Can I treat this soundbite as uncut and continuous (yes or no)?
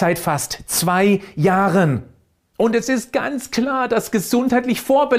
yes